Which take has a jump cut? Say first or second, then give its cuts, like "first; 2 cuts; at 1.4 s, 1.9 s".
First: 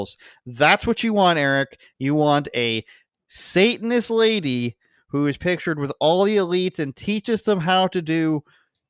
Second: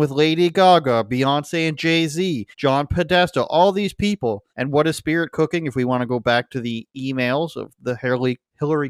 second; 2 cuts; at 2.5 s, 4.5 s